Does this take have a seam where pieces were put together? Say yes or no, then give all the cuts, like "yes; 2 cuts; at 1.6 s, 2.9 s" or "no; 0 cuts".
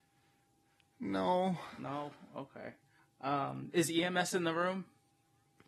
yes; 1 cut; at 3.0 s